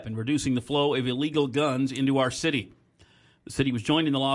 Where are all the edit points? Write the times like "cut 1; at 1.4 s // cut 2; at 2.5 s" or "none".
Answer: none